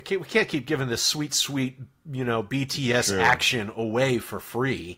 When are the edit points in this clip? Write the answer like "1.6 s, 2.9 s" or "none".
none

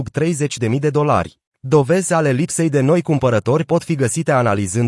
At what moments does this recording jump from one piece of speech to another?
1.5 s

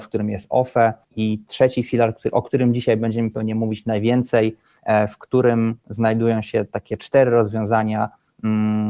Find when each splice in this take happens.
1.0 s

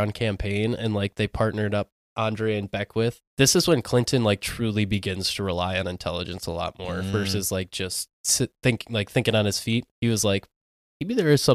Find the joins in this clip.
3.3 s, 8.1 s, 9.9 s

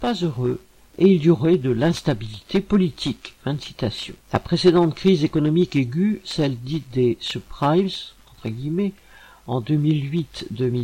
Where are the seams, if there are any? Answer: 3.4 s, 4.2 s

